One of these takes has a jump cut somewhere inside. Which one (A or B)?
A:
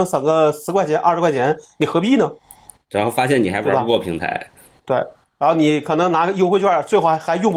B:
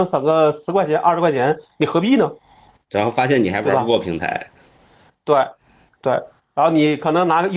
A